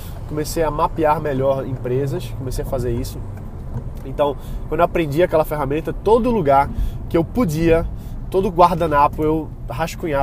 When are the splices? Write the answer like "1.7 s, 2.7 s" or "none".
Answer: none